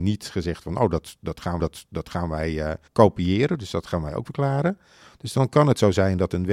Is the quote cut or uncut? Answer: cut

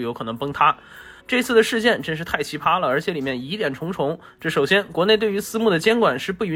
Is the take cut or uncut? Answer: cut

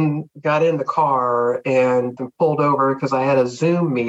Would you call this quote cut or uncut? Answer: cut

